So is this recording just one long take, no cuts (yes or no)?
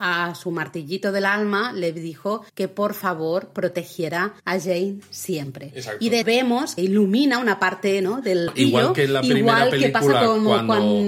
no